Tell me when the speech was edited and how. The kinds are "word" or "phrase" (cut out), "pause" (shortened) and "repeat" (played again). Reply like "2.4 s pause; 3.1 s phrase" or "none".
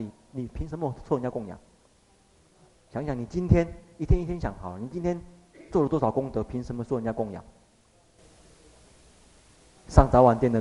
none